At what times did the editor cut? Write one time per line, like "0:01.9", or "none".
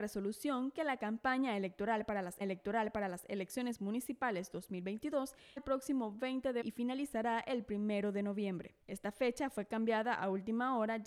0:02.4
0:05.6
0:06.6
0:08.8